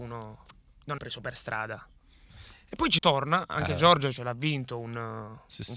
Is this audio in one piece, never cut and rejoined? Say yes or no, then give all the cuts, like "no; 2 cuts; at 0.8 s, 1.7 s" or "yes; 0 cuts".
no; 2 cuts; at 1.0 s, 3.0 s